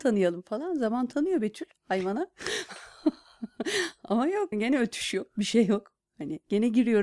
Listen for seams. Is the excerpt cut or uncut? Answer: cut